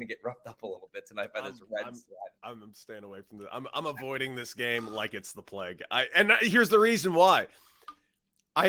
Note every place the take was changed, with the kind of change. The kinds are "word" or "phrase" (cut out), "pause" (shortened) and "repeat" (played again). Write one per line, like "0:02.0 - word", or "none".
0:02.4 - pause